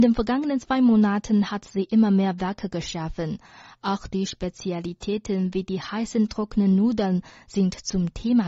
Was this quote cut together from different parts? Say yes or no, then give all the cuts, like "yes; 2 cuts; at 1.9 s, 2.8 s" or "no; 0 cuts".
no; 0 cuts